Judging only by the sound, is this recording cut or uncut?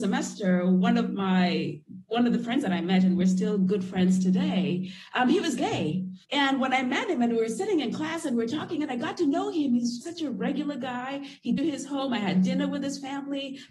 cut